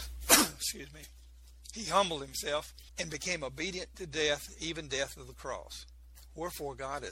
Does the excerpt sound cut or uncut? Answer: cut